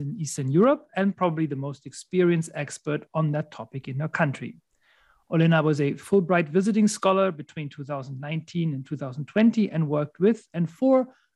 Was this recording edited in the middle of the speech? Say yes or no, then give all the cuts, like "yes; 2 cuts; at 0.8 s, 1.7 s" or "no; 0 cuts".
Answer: no; 0 cuts